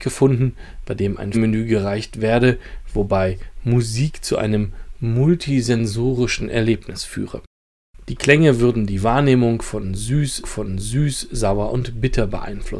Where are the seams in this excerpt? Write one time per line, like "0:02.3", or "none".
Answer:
0:01.3
0:10.4